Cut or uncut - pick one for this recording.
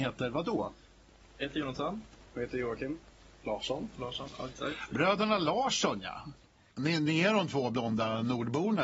uncut